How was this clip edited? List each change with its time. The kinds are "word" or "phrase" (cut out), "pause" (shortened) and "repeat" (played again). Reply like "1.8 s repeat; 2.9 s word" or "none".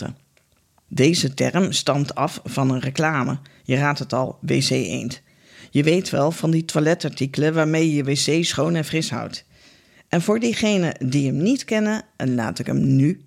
none